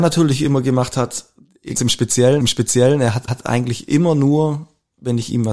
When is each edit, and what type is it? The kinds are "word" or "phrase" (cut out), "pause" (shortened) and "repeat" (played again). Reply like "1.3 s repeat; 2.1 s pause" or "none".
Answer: 1.8 s word; 2.4 s repeat; 3.3 s repeat